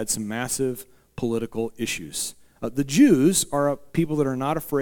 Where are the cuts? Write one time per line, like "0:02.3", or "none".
none

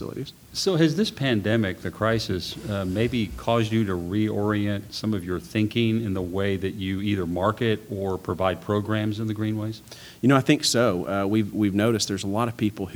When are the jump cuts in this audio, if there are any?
none

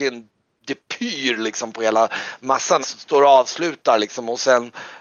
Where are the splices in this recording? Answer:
0:02.8

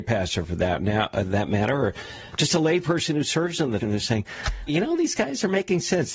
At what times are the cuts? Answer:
0:03.8
0:04.7

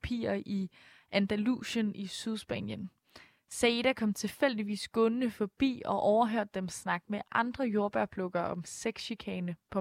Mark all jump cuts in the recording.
none

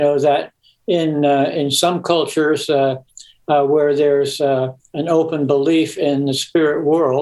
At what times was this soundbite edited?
none

